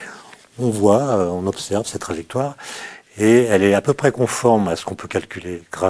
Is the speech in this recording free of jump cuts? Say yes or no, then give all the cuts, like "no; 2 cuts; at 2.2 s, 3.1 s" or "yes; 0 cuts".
yes; 0 cuts